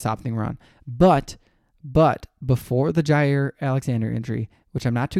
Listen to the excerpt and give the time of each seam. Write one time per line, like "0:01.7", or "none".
none